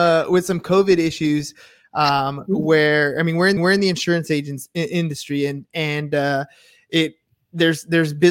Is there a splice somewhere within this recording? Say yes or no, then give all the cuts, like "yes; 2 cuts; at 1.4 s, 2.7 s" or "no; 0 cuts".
yes; 1 cut; at 3.6 s